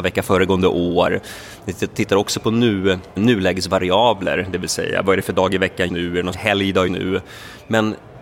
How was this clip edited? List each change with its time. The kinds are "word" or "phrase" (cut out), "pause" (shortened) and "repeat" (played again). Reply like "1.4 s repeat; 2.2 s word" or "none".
3.2 s word; 5.9 s word; 6.3 s word; 6.9 s word